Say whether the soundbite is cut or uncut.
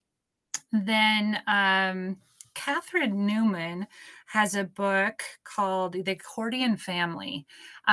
uncut